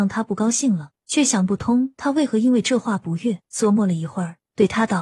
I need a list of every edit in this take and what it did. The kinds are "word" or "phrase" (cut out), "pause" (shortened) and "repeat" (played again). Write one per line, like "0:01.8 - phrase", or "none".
0:01.0 - pause
0:03.5 - pause